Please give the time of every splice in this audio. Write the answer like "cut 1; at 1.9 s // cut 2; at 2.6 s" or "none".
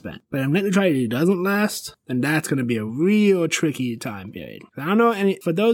none